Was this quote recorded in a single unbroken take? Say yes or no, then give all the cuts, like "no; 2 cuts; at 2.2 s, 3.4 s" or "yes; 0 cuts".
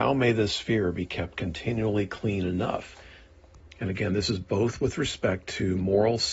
yes; 0 cuts